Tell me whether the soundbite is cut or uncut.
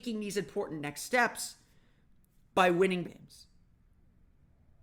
cut